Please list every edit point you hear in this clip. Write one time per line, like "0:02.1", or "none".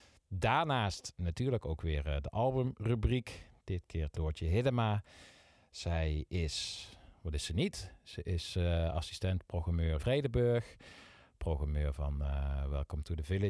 0:04.1
0:10.0